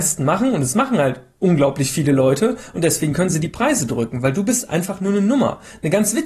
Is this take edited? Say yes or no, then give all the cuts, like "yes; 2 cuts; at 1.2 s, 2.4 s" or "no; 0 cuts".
no; 0 cuts